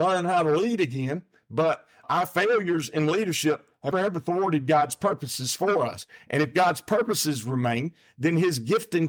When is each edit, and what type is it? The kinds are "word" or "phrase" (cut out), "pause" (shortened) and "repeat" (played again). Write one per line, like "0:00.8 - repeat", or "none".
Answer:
0:03.9 - word